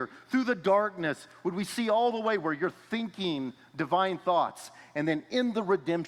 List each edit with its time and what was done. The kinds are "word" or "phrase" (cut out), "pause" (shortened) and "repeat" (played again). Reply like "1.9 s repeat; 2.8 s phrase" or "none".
none